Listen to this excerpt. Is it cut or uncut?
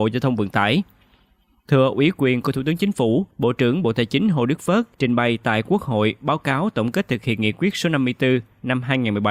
cut